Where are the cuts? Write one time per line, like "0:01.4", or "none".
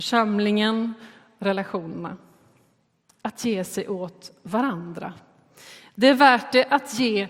none